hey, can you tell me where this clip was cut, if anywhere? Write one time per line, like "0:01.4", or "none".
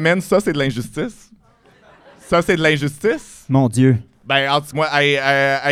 0:04.7